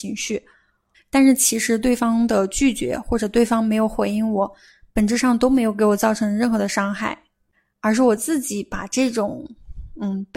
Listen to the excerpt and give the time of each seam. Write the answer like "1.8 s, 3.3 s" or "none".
none